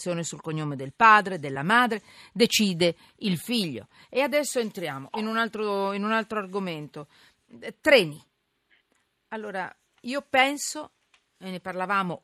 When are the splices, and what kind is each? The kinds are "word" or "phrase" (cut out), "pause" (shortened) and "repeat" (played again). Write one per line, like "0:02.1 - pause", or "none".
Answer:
none